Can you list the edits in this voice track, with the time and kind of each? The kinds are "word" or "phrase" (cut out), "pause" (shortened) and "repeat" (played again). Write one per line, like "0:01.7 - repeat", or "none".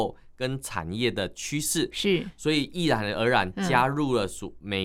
none